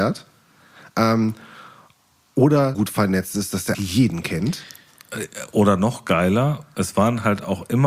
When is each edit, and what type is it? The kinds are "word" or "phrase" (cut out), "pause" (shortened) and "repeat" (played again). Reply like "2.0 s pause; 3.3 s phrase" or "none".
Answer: 2.7 s phrase; 3.7 s word